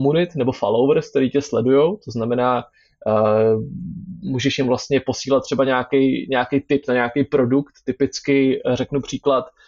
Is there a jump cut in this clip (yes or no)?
no